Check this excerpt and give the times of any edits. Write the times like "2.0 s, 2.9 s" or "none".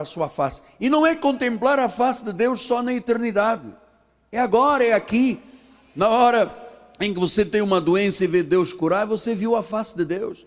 none